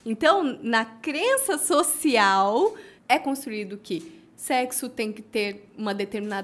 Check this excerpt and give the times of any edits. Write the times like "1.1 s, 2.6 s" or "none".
3.0 s